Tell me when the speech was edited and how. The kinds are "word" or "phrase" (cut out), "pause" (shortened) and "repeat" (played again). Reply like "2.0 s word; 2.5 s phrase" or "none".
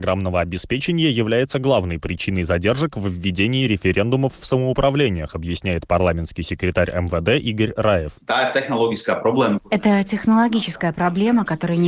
8.2 s pause